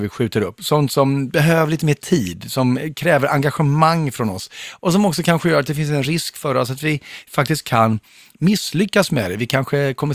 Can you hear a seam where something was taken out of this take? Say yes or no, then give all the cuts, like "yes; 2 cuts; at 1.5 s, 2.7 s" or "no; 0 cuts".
no; 0 cuts